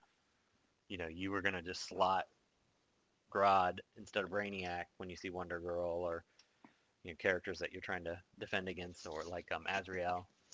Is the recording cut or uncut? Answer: uncut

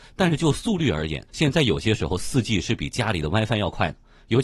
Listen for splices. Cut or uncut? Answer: cut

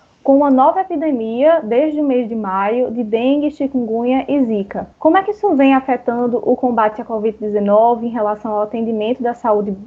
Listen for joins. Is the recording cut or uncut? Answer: cut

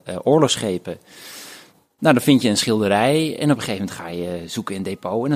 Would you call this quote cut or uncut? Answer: uncut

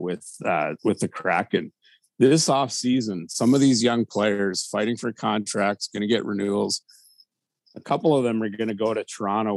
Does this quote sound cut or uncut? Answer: uncut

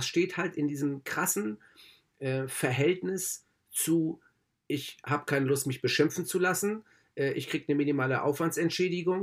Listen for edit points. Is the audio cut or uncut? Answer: uncut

